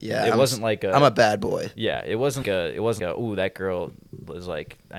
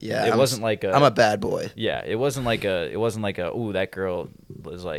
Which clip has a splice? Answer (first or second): first